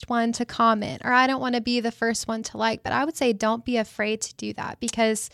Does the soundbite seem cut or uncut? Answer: uncut